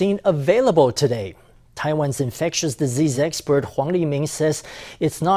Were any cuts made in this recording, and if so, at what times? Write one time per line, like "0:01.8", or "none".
none